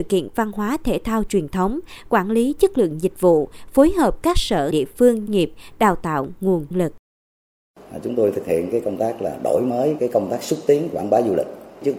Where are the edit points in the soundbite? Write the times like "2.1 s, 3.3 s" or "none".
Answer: 4.7 s, 5.3 s, 6.7 s, 10.0 s